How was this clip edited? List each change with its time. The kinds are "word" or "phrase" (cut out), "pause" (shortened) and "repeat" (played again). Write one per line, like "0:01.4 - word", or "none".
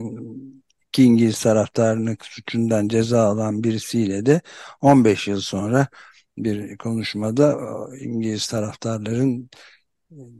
0:02.2 - word